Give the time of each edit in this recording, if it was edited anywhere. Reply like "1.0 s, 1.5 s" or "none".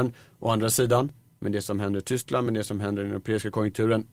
none